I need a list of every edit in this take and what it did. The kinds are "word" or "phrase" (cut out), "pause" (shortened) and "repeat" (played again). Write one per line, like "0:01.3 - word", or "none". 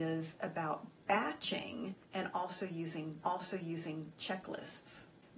0:02.0 - pause
0:03.2 - repeat